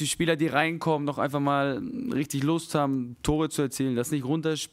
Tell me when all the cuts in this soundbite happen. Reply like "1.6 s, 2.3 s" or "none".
none